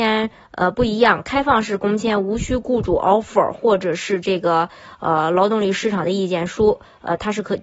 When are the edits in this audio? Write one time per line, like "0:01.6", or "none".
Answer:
none